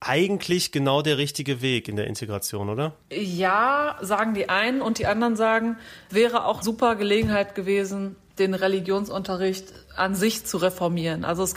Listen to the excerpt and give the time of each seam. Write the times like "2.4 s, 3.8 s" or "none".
6.1 s, 6.6 s, 8.4 s